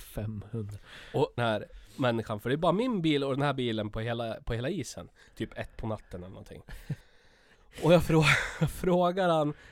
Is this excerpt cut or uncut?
cut